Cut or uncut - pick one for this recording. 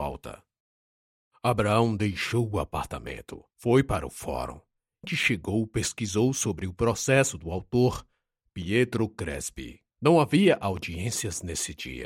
cut